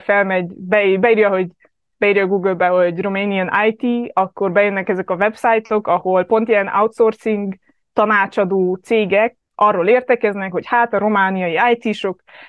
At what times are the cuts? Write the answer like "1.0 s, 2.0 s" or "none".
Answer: none